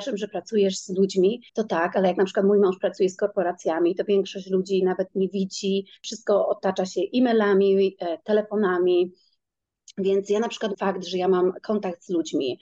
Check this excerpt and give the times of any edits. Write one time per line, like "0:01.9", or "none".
0:01.5
0:06.0
0:10.7